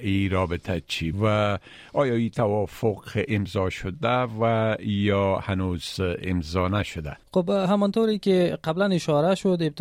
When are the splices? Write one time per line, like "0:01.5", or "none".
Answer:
0:01.1
0:07.2

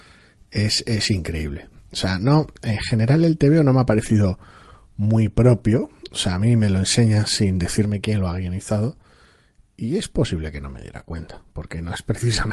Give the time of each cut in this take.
none

